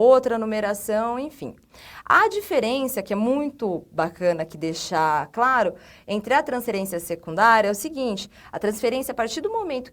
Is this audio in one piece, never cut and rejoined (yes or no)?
yes